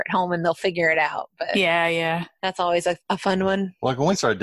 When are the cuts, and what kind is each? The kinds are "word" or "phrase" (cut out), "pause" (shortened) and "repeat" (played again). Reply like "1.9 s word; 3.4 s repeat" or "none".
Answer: none